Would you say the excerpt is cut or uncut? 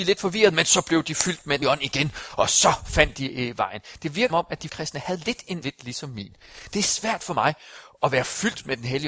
cut